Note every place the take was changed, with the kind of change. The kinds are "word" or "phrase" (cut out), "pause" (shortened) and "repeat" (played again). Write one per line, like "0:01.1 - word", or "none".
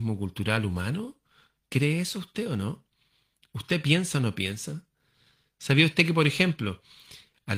none